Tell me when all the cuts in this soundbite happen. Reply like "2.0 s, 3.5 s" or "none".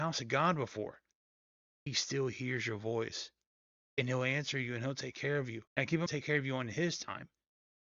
5.7 s, 6.1 s